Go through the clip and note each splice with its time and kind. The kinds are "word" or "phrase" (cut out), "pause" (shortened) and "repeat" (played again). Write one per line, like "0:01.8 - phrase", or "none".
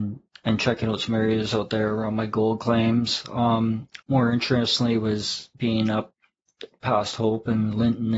0:04.0 - pause